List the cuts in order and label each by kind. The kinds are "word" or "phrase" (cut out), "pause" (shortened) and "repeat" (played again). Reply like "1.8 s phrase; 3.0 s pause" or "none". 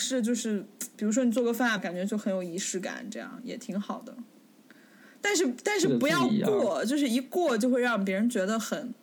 1.8 s phrase